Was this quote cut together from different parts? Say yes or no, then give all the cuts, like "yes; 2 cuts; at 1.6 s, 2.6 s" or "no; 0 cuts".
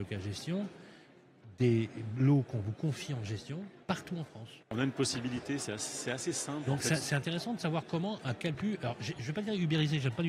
yes; 3 cuts; at 3.8 s, 4.6 s, 8.5 s